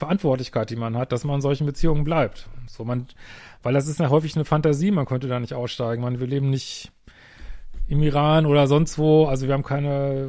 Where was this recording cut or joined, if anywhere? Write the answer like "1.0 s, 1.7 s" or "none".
none